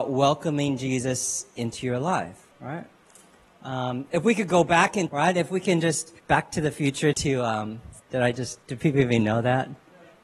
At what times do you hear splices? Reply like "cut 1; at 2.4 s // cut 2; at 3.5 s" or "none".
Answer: cut 1; at 2.5 s // cut 2; at 5.1 s // cut 3; at 6.2 s // cut 4; at 7.1 s // cut 5; at 8.0 s // cut 6; at 8.6 s